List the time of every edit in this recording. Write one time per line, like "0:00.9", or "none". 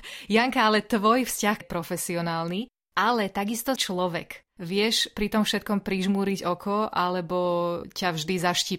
0:01.6
0:03.8

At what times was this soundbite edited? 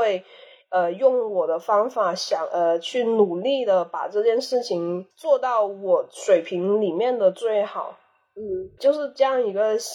0:08.8

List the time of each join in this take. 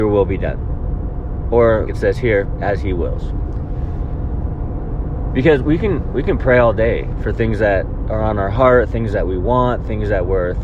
0:01.9

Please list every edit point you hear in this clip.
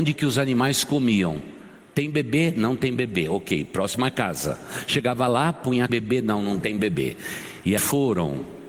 0:05.9
0:07.8

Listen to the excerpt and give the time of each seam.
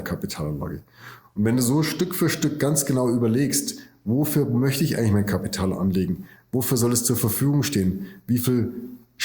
none

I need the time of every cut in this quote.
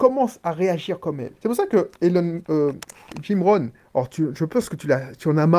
0:01.4

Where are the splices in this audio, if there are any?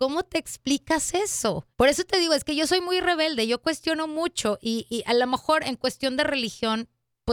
0:01.7

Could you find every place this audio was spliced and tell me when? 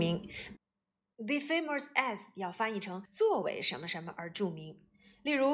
0:03.1

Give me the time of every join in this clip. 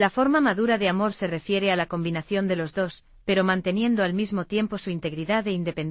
none

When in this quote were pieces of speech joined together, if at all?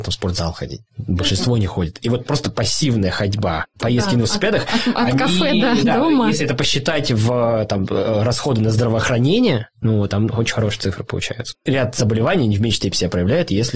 none

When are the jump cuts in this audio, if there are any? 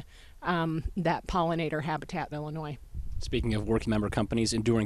0:02.3
0:03.8

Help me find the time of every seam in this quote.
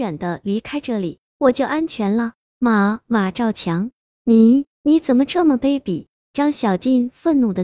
0:04.7

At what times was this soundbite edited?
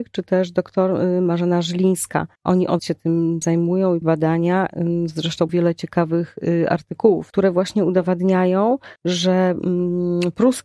0:02.4
0:02.8
0:03.4
0:04.0
0:05.5
0:07.3
0:09.0

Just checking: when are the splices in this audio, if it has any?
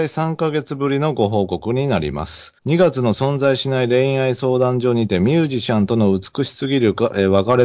0:02.6

